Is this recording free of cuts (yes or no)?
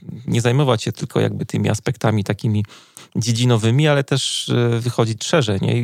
yes